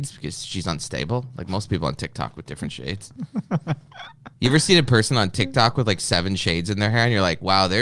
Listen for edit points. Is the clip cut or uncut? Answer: uncut